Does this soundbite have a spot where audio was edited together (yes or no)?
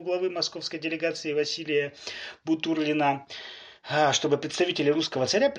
no